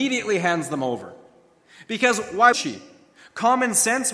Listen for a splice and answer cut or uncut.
cut